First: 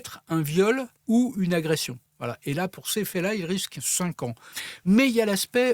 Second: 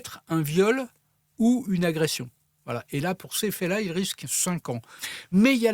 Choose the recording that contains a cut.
first; 2 cuts; at 1.0 s, 2.1 s

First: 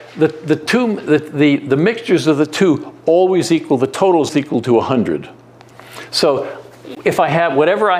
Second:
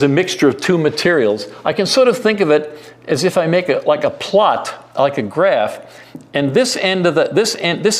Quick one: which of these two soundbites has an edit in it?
first; 1 cut; at 4.3 s

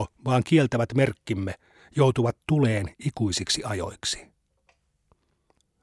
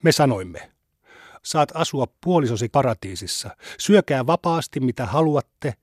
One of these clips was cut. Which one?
second; 2 cuts; at 1.4 s, 2.7 s

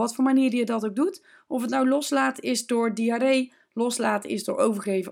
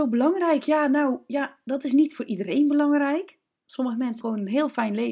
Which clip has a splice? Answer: second; 1 cut; at 4.2 s

